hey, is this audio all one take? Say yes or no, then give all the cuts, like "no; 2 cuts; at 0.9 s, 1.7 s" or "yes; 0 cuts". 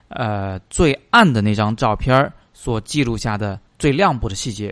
no; 1 cut; at 3.7 s